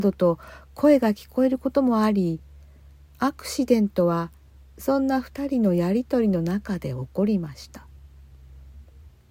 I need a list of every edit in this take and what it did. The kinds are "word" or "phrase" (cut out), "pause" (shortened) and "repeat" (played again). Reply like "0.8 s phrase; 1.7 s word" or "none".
none